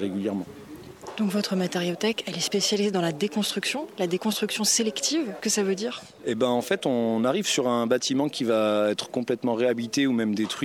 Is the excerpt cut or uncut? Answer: cut